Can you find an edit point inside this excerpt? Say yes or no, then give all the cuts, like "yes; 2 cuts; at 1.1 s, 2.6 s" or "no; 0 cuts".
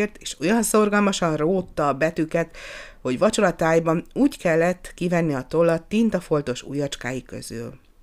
yes; 1 cut; at 3.0 s